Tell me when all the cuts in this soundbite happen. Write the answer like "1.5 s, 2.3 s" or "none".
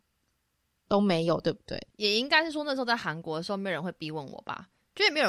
1.9 s